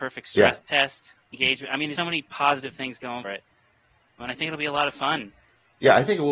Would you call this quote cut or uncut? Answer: cut